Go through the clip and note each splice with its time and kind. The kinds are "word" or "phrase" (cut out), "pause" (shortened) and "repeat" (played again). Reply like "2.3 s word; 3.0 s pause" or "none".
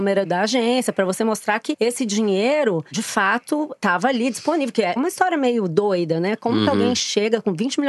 none